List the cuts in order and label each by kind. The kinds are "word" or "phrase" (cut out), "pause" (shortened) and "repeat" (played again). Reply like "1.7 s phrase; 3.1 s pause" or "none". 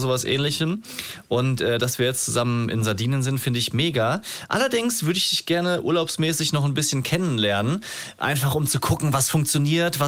none